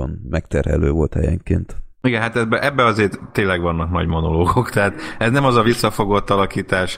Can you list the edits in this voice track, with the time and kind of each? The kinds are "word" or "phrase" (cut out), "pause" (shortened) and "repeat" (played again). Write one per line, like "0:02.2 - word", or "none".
0:01.9 - pause